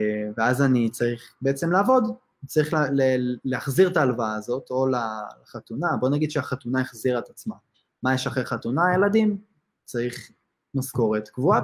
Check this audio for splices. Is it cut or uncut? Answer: uncut